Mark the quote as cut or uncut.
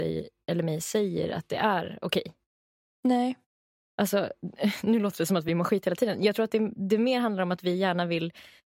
uncut